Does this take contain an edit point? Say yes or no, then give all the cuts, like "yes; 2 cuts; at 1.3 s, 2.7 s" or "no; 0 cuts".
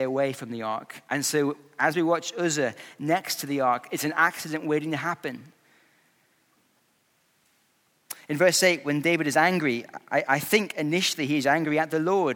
no; 0 cuts